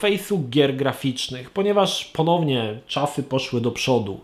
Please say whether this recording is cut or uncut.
uncut